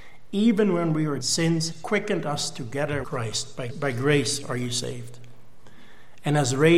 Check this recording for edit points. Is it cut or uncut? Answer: cut